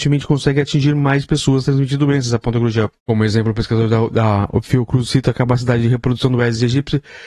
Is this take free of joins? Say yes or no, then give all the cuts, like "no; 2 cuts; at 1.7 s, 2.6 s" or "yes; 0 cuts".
no; 1 cut; at 3.0 s